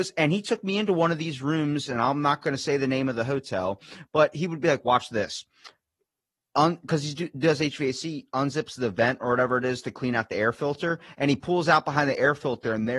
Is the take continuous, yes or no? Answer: yes